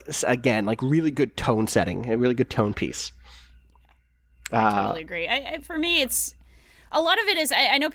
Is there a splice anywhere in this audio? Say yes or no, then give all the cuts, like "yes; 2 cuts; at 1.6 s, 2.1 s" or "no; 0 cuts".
no; 0 cuts